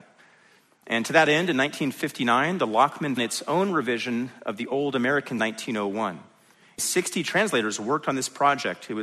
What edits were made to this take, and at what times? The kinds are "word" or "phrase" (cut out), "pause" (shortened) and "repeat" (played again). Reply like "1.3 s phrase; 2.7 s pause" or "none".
3.2 s phrase; 5.4 s phrase